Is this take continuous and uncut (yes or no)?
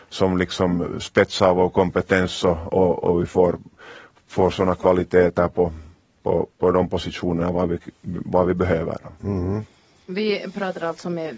yes